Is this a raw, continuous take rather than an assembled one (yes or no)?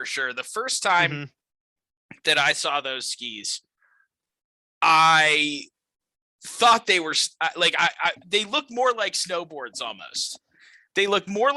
yes